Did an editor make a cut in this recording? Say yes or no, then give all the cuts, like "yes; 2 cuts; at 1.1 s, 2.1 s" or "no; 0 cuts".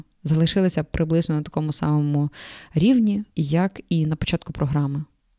yes; 1 cut; at 3.3 s